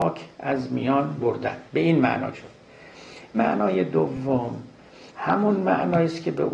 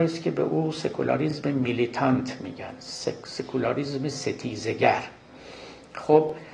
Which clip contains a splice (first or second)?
first